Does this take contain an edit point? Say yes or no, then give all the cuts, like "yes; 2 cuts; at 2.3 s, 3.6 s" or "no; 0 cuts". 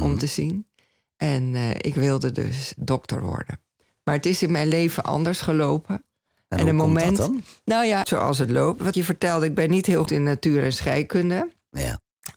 yes; 4 cuts; at 2.8 s, 8.0 s, 8.9 s, 10.1 s